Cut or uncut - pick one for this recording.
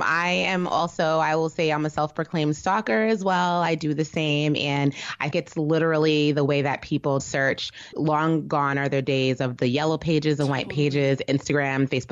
cut